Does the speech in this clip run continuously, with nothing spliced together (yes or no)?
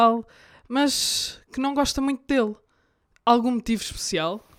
yes